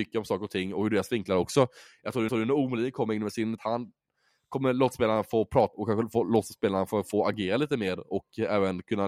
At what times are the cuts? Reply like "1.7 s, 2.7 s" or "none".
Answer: 2.3 s, 3.6 s, 5.7 s